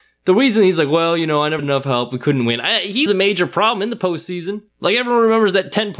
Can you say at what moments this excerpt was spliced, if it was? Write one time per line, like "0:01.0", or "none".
0:01.6
0:03.1
0:04.7

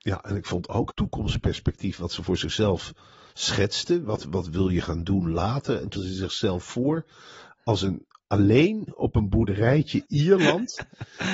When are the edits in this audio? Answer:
0:00.9
0:06.0
0:10.1

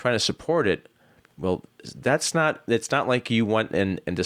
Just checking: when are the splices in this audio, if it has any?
none

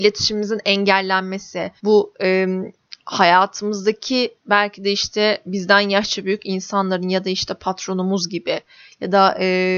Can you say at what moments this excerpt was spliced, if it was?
0:01.8
0:04.4
0:05.5

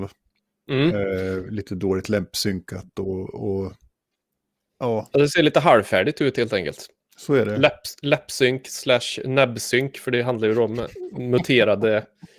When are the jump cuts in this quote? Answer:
none

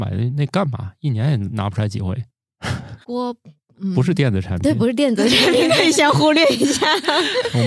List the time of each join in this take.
0:03.0

